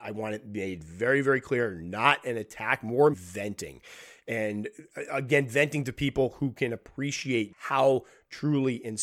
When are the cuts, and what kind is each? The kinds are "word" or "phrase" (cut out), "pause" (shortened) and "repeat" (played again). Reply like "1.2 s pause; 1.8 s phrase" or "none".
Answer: 3.1 s word; 7.5 s word